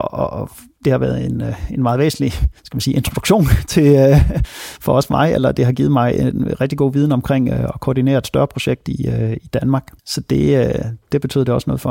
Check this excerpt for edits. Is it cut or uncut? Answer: cut